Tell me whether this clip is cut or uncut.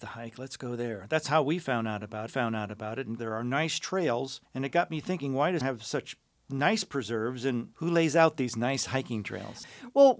cut